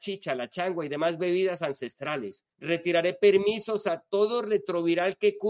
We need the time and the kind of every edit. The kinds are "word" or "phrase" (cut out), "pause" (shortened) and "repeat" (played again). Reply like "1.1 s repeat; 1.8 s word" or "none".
2.5 s pause